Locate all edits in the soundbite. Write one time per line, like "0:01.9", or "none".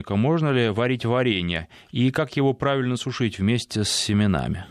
none